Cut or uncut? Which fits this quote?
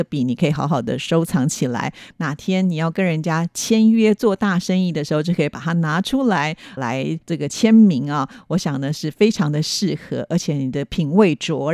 cut